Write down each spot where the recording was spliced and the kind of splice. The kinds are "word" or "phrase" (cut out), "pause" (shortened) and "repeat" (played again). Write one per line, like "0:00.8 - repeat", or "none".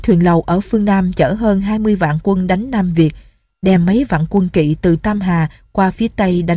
none

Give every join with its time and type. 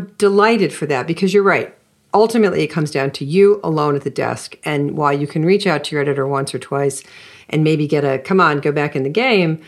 none

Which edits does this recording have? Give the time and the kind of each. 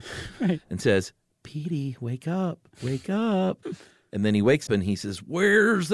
0:02.7 - pause
0:03.6 - pause
0:04.7 - word

